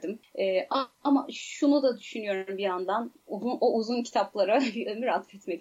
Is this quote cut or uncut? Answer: uncut